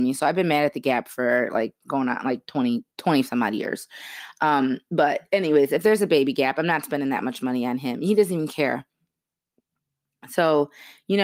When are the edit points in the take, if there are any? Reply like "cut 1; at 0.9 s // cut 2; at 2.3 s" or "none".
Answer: cut 1; at 2.9 s